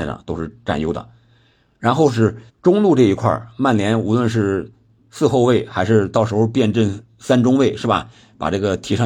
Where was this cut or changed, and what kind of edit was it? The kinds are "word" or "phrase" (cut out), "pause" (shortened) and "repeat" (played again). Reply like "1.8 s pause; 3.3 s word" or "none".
2.5 s pause